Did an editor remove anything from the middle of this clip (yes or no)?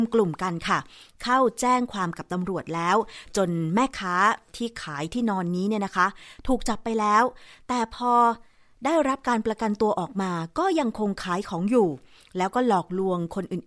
no